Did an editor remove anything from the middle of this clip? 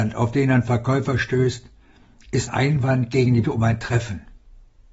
yes; 2 cuts; at 2.5 s, 3.4 s

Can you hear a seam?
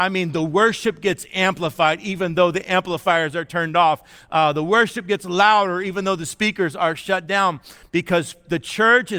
no; 0 cuts

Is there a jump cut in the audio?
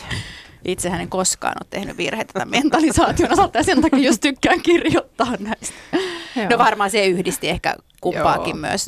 no; 0 cuts

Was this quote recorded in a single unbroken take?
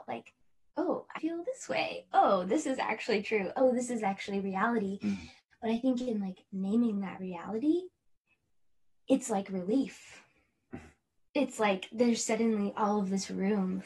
no; 2 cuts; at 1.2 s, 8.3 s

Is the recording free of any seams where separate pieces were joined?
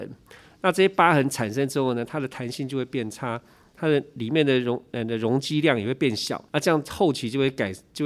no; 1 cut; at 6.5 s

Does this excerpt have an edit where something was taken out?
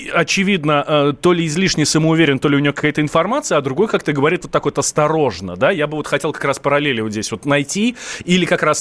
no; 0 cuts

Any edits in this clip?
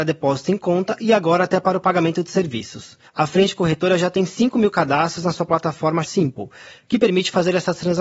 yes; 2 cuts; at 3.1 s, 6.0 s

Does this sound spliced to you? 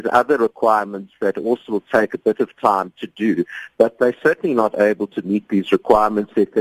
no; 0 cuts

